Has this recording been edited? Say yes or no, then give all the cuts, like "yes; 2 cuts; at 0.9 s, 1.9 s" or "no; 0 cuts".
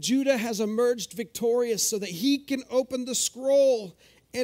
no; 0 cuts